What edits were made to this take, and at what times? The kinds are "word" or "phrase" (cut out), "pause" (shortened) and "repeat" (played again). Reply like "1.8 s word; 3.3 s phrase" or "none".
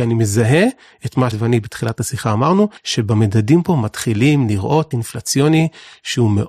1.3 s word; 2.8 s pause; 4.9 s word